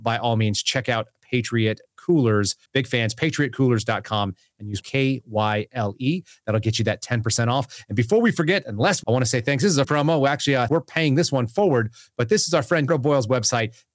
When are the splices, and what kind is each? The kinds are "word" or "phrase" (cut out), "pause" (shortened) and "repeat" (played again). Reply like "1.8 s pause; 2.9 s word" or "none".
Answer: 2.7 s pause; 4.8 s phrase; 9.0 s phrase; 9.8 s word; 10.7 s word; 12.9 s word